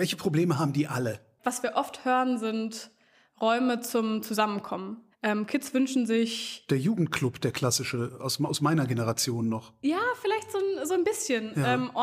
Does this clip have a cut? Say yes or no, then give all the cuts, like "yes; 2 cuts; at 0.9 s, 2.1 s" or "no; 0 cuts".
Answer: yes; 1 cut; at 5.1 s